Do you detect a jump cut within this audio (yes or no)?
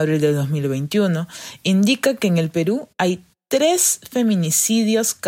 no